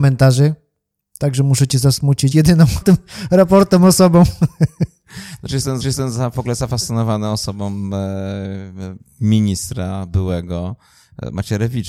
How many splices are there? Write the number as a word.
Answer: three